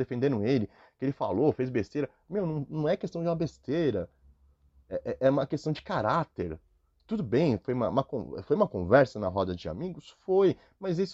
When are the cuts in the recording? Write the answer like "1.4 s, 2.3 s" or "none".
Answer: none

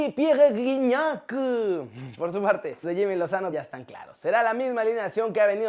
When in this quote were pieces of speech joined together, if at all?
2.8 s, 3.5 s

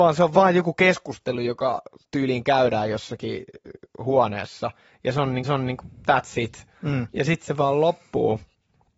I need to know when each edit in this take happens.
5.4 s, 6.8 s

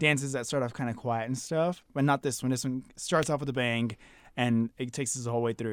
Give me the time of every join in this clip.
none

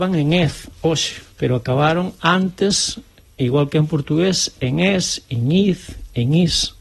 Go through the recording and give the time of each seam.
1.3 s

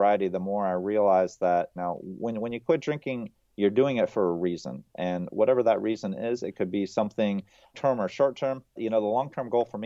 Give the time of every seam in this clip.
1.8 s, 7.7 s, 8.8 s

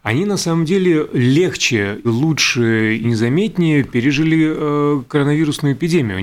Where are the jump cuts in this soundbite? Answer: 2.0 s, 3.0 s

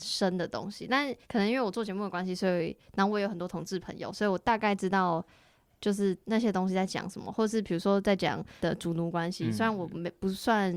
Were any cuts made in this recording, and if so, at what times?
1.2 s, 6.2 s, 8.6 s

